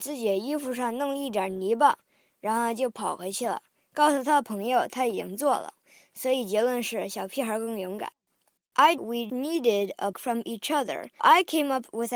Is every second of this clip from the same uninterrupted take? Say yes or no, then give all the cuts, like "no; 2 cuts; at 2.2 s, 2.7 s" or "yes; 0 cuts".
no; 4 cuts; at 9.0 s, 9.3 s, 10.1 s, 11.2 s